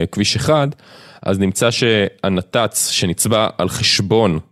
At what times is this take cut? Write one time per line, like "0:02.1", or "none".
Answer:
none